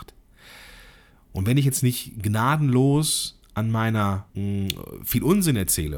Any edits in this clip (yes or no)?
yes